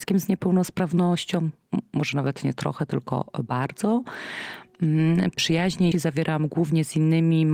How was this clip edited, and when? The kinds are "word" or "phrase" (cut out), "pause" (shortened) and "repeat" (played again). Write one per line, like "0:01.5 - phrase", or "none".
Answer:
0:05.9 - phrase